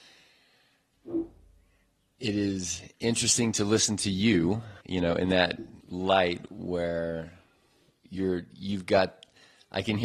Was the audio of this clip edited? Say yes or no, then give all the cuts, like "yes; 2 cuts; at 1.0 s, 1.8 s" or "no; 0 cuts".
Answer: yes; 2 cuts; at 4.8 s, 5.8 s